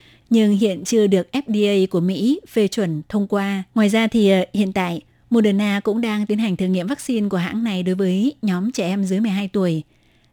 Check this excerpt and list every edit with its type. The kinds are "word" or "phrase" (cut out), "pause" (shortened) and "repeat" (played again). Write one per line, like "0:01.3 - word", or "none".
0:03.7 - pause